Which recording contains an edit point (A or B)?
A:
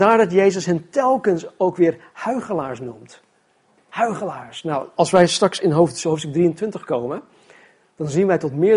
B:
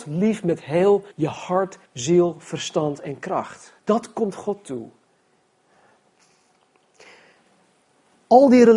B